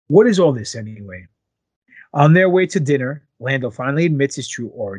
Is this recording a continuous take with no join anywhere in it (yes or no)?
yes